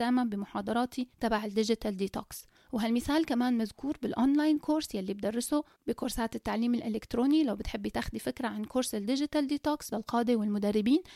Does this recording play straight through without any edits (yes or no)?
no